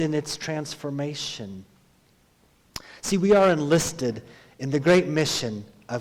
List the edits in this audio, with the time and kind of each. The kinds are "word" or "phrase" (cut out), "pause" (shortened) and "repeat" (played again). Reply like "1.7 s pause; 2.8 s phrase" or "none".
none